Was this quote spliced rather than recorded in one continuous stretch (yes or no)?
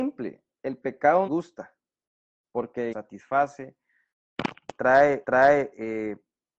yes